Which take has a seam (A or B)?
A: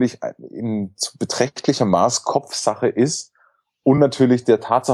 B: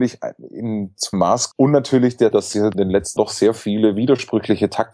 B